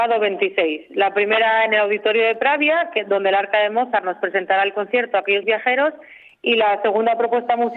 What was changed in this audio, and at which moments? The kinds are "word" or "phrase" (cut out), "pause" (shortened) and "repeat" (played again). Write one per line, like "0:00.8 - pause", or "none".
0:05.4 - word